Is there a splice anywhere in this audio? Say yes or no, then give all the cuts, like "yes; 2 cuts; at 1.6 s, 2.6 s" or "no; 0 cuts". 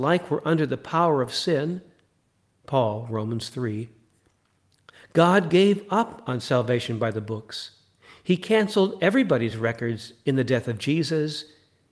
no; 0 cuts